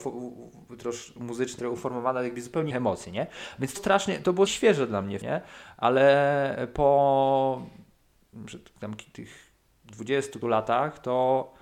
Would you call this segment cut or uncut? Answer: cut